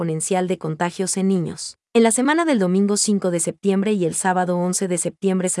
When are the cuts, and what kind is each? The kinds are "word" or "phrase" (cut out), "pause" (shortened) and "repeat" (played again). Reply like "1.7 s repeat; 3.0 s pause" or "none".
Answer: 1.9 s pause